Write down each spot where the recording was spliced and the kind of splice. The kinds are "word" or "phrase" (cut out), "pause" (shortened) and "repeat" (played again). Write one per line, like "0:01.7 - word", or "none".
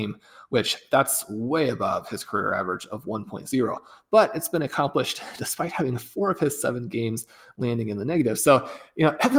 none